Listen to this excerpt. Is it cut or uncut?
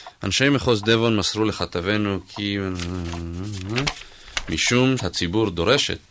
cut